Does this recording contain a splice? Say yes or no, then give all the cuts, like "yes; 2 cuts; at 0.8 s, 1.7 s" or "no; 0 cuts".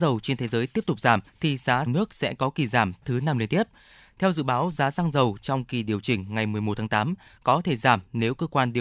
yes; 3 cuts; at 1.3 s, 1.9 s, 3.0 s